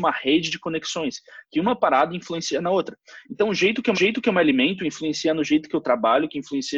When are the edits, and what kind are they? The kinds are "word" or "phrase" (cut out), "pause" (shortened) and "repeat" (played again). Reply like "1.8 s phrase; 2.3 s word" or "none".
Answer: 3.9 s repeat

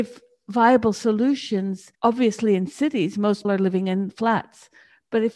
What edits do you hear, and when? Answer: 1.9 s pause; 3.4 s word

